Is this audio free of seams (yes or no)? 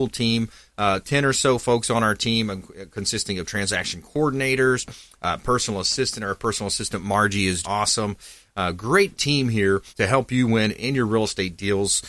no